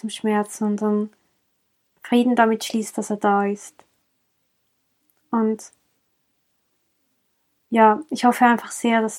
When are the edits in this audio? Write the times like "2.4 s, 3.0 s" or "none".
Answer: none